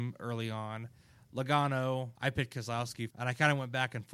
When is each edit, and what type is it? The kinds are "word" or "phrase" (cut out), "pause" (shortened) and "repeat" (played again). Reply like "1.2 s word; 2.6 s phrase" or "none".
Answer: 2.2 s pause; 3.1 s word